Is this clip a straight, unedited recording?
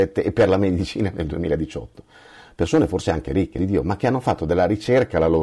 no; 1 cut; at 3.6 s

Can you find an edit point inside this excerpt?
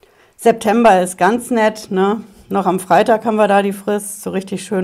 no; 0 cuts

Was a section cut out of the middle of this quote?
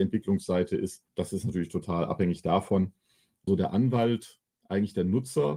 yes; 2 cuts; at 1.1 s, 3.5 s

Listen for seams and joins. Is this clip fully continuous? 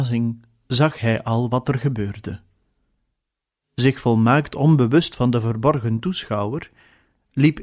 yes; 0 cuts

